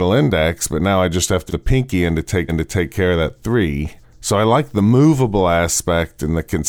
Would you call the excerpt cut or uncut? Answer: cut